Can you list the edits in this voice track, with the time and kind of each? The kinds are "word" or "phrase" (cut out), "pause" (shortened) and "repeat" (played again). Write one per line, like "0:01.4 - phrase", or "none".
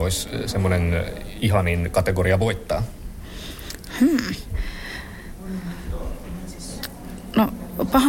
none